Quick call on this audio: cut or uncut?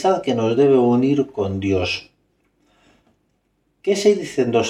uncut